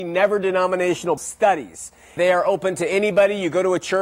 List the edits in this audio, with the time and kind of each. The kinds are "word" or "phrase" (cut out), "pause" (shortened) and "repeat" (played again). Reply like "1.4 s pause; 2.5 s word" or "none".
1.2 s word; 2.2 s word